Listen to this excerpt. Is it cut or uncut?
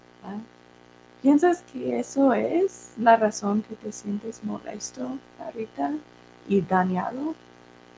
uncut